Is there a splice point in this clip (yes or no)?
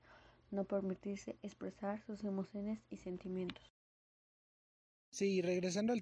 no